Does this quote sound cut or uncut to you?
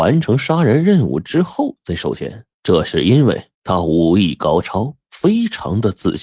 cut